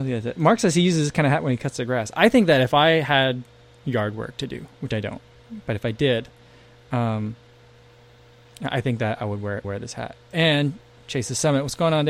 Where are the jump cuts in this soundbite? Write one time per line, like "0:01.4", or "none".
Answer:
0:09.6